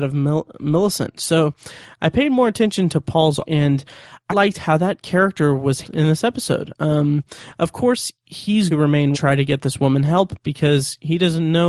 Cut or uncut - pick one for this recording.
cut